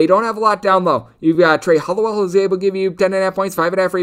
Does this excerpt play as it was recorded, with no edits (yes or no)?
yes